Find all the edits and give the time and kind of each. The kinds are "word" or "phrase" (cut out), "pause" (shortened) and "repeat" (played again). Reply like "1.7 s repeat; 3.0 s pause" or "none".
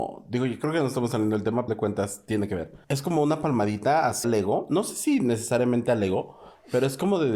1.7 s phrase; 2.8 s pause; 4.2 s word